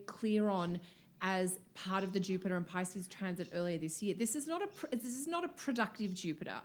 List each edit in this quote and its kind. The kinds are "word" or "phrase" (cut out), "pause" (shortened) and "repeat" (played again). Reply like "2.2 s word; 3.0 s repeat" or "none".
none